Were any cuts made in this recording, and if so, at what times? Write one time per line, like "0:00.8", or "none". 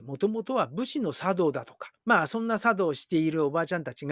0:02.0